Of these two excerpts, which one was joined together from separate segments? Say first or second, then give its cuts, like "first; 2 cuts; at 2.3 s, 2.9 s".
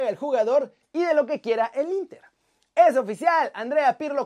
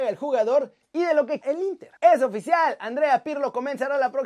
second; 2 cuts; at 1.4 s, 2.0 s